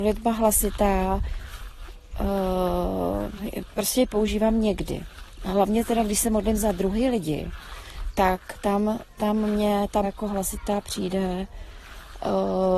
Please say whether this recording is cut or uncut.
cut